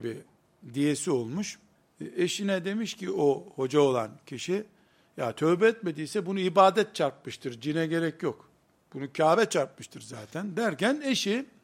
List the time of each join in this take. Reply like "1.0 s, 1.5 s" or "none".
1.8 s

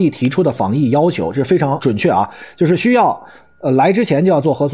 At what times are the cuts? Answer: none

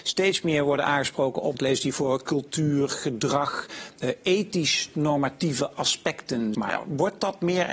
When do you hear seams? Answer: 1.5 s, 6.5 s

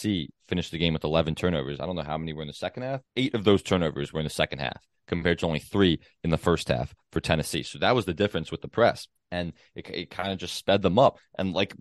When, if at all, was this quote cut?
3.1 s, 9.2 s

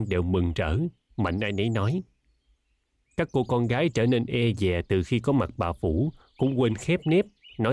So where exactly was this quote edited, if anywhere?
none

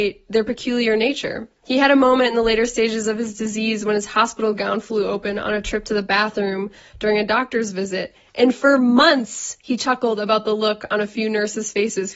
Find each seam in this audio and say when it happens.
none

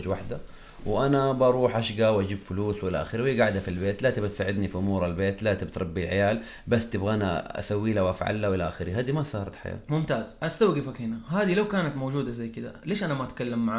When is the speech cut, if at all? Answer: none

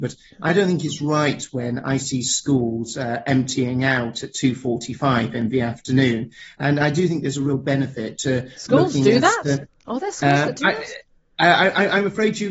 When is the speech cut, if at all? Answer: none

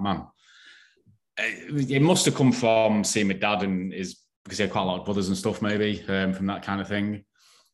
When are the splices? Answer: none

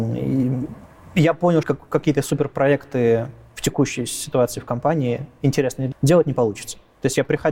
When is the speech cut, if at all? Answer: 1.6 s, 5.9 s

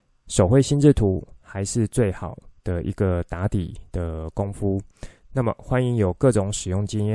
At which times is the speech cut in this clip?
2.6 s

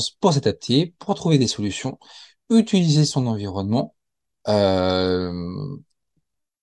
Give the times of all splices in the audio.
none

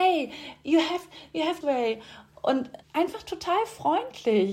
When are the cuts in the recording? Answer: 1.6 s, 2.8 s

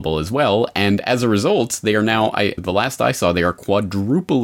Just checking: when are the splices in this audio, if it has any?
2.6 s

